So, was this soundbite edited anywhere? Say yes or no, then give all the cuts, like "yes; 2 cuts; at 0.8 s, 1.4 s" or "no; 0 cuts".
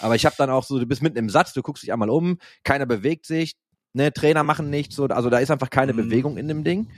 no; 0 cuts